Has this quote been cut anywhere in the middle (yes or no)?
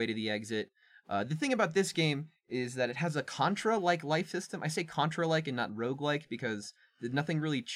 no